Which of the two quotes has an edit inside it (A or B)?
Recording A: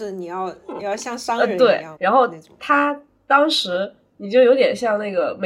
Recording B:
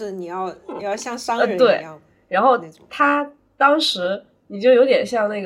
A